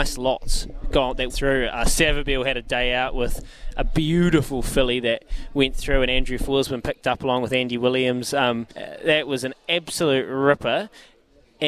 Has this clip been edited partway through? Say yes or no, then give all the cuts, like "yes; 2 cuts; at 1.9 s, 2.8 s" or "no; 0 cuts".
yes; 2 cuts; at 1.3 s, 8.7 s